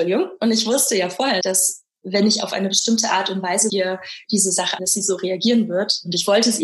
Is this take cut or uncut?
cut